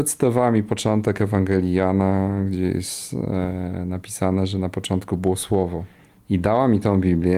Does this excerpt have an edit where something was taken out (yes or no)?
no